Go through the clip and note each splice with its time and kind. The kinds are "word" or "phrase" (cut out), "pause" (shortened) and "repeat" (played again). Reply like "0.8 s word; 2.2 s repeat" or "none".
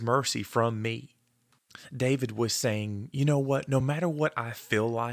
none